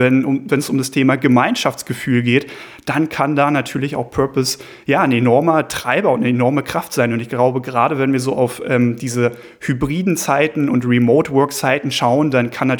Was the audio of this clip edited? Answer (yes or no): no